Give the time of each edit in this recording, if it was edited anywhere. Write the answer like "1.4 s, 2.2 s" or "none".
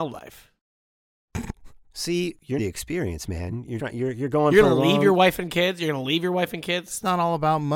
2.6 s, 3.8 s

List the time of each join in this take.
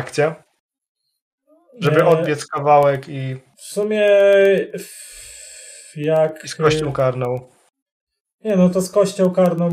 none

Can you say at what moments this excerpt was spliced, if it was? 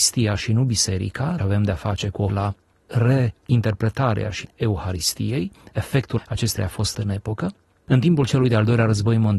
1.4 s, 2.3 s, 4.4 s, 6.2 s, 6.6 s, 6.9 s

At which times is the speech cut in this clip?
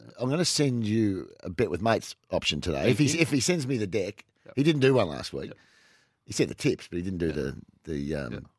none

